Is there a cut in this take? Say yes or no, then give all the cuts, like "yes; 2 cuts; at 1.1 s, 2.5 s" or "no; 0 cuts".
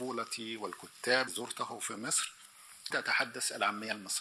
yes; 2 cuts; at 1.3 s, 2.9 s